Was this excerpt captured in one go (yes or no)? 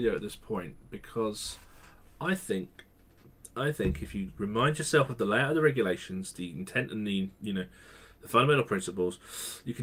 yes